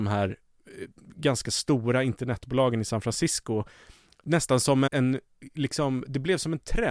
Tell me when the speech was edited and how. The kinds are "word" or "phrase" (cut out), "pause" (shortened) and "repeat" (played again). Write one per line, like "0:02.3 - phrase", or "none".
0:04.9 - word